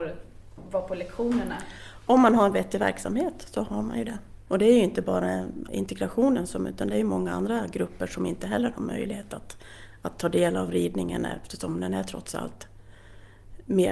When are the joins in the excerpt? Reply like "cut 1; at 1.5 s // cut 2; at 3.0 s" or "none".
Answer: cut 1; at 5.7 s